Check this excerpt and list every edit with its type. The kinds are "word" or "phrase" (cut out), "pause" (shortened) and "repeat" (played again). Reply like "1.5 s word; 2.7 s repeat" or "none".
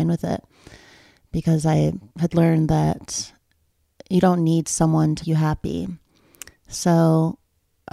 2.1 s pause; 5.2 s word